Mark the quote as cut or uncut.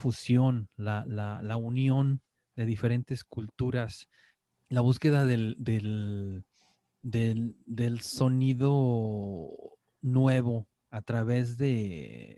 uncut